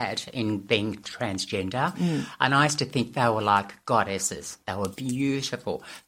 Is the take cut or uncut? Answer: uncut